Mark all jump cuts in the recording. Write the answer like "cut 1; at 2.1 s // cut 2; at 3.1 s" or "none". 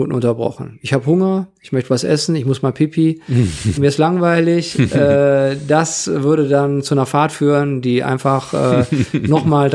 cut 1; at 3.8 s

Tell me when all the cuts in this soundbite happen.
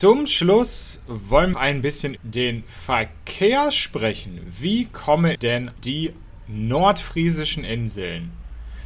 cut 1; at 1.5 s // cut 2; at 2.2 s // cut 3; at 5.3 s // cut 4; at 5.8 s

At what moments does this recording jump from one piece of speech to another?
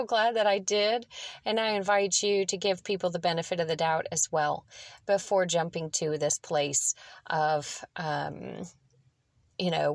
none

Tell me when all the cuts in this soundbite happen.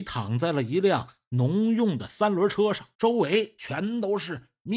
cut 1; at 2.9 s

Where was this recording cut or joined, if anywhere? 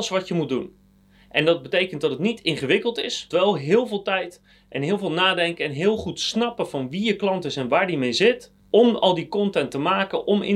cut 1; at 3.3 s // cut 2; at 8.6 s

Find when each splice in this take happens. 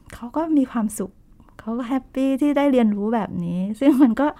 none

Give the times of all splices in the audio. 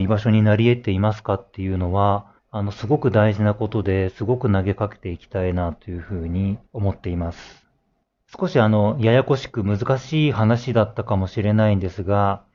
cut 1; at 2.4 s // cut 2; at 6.7 s // cut 3; at 8.0 s

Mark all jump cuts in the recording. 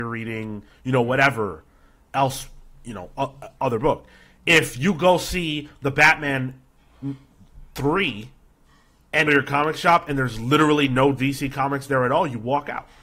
cut 1; at 9.3 s

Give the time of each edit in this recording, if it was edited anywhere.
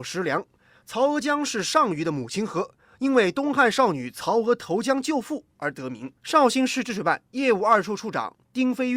cut 1; at 6.2 s

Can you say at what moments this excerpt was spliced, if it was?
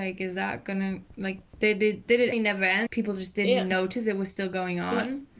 cut 1; at 1.5 s // cut 2; at 2.3 s // cut 3; at 2.9 s

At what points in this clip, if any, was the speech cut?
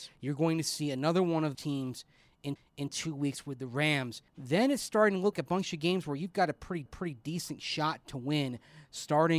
cut 1; at 1.5 s // cut 2; at 2.6 s // cut 3; at 4.3 s // cut 4; at 5.3 s // cut 5; at 6.9 s

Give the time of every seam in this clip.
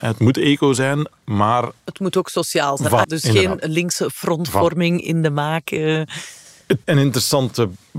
cut 1; at 3.0 s // cut 2; at 6.8 s

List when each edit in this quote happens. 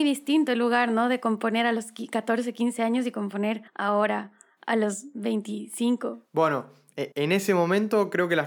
cut 1; at 3.7 s // cut 2; at 7.1 s

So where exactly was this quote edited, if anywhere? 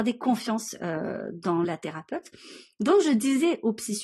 cut 1; at 1.6 s

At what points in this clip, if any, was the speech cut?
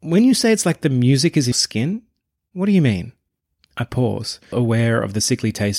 cut 1; at 1.5 s // cut 2; at 4.5 s

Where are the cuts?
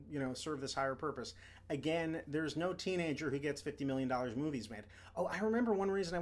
none

